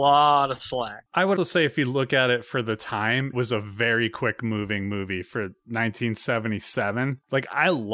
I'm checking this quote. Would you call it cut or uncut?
cut